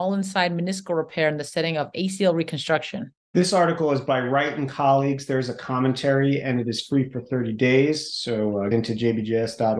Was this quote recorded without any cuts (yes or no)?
no